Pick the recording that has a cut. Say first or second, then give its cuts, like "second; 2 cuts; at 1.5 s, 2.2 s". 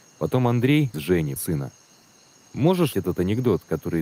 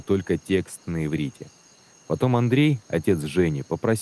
first; 3 cuts; at 0.9 s, 1.4 s, 2.9 s